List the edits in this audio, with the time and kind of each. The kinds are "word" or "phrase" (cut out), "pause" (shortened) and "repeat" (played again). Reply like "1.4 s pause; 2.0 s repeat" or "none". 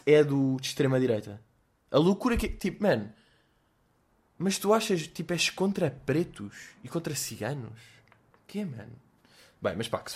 none